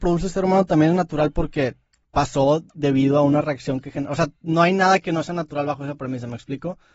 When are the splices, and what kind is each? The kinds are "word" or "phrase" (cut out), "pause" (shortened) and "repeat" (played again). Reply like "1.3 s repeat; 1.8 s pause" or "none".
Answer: 2.0 s pause